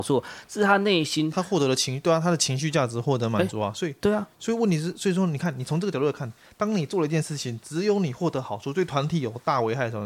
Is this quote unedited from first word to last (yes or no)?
yes